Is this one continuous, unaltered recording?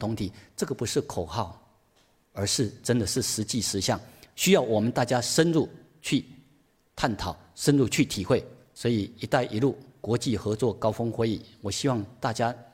yes; 0 cuts

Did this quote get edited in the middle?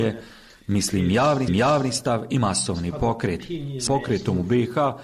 yes; 2 cuts; at 1.5 s, 3.9 s

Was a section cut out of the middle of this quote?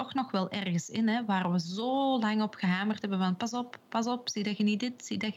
no; 0 cuts

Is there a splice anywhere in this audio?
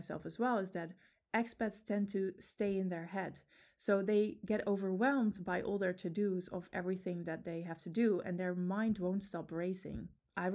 no; 0 cuts

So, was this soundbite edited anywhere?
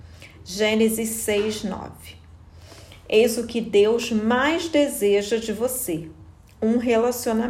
no; 0 cuts

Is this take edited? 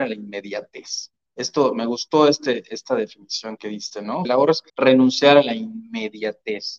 yes; 4 cuts; at 1.3 s, 3.6 s, 4.2 s, 4.7 s

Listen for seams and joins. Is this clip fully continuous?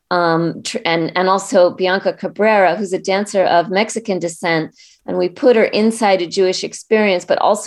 yes; 0 cuts

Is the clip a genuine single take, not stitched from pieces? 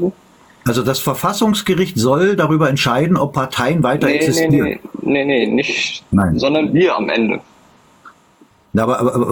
yes; 0 cuts

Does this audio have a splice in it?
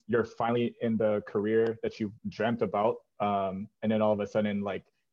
yes; 1 cut; at 2.2 s

